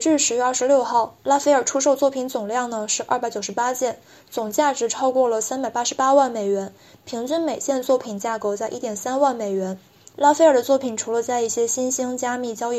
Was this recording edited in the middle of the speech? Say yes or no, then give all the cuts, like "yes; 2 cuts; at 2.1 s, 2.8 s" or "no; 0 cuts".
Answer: no; 0 cuts